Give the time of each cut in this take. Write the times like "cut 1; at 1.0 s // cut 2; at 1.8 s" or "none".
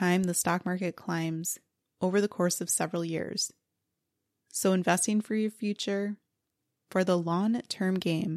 none

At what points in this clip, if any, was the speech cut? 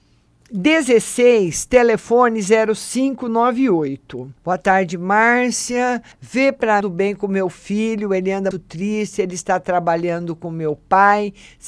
cut 1; at 4.4 s // cut 2; at 6.1 s // cut 3; at 6.8 s // cut 4; at 8.5 s

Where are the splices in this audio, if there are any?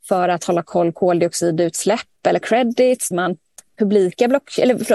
cut 1; at 0.9 s // cut 2; at 2.4 s // cut 3; at 3.1 s

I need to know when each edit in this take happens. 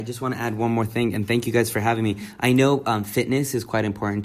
none

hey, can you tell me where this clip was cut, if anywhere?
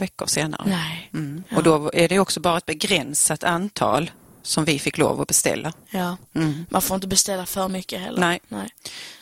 none

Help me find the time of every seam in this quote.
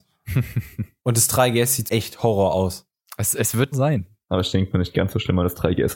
cut 1; at 1.9 s // cut 2; at 3.7 s

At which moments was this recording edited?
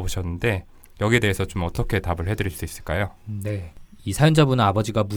cut 1; at 3.2 s

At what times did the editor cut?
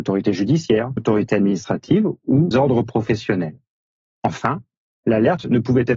cut 1; at 1.0 s // cut 2; at 2.5 s

